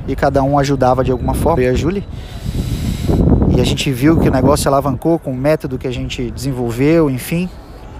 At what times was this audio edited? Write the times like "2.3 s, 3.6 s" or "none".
1.6 s